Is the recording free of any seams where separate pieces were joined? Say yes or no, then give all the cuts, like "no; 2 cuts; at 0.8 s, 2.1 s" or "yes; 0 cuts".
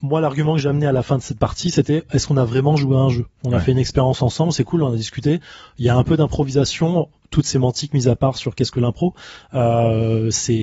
yes; 0 cuts